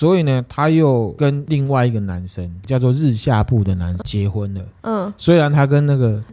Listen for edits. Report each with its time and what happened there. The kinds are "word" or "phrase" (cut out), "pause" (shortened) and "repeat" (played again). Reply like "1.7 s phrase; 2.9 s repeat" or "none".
4.0 s word